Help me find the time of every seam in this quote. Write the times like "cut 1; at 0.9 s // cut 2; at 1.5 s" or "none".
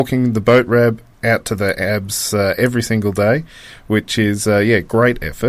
none